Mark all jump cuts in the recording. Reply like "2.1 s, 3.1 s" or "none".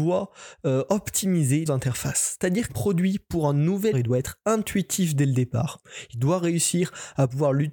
1.7 s, 2.7 s, 3.9 s